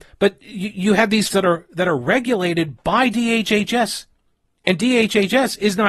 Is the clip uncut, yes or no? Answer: no